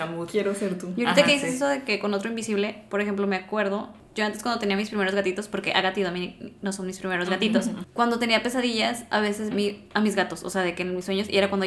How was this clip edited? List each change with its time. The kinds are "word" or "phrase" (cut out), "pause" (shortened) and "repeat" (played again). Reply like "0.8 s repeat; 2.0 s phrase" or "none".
9.5 s word